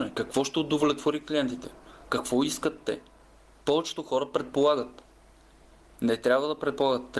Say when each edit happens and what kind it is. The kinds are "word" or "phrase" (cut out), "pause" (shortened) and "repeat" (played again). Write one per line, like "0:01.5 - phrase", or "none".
none